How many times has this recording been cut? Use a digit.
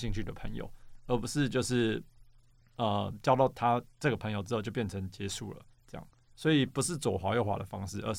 1